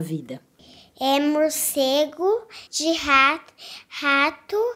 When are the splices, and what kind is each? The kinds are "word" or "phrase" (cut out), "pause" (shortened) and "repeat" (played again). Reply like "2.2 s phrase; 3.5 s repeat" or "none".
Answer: 2.7 s pause